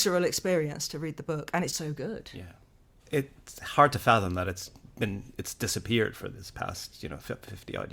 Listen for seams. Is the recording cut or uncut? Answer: cut